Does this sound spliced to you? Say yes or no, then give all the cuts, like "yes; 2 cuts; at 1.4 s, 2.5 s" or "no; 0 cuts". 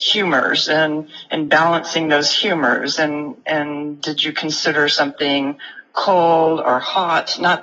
no; 0 cuts